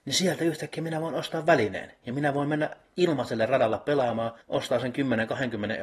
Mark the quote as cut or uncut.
cut